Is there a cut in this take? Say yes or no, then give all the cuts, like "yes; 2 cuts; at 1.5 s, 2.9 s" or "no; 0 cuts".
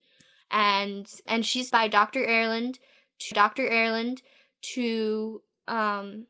yes; 3 cuts; at 1.3 s, 1.7 s, 3.3 s